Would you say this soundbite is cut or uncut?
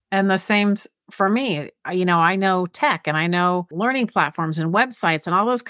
uncut